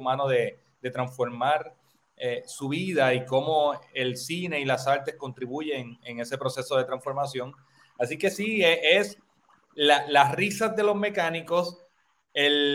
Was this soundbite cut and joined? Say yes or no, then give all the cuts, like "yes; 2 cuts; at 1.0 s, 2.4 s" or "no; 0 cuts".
no; 0 cuts